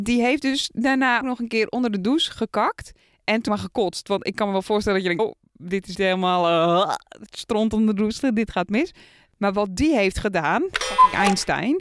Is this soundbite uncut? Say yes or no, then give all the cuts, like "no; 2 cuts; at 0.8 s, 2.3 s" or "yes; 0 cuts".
no; 5 cuts; at 1.2 s, 3.5 s, 5.2 s, 6.0 s, 7.3 s